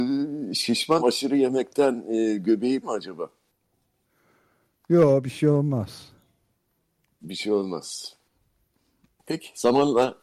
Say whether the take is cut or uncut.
cut